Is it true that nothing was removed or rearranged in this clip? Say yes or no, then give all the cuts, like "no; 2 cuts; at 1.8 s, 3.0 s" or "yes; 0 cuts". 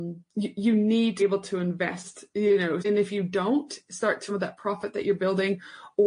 no; 3 cuts; at 1.2 s, 2.8 s, 4.3 s